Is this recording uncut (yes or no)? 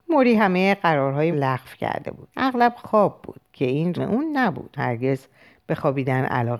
no